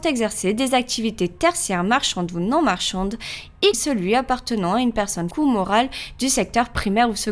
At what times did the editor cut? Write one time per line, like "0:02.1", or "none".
0:03.7
0:05.3